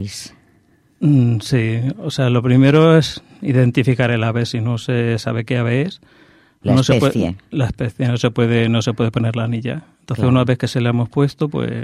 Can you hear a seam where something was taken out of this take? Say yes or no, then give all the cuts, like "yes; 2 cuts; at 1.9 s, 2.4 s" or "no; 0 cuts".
no; 0 cuts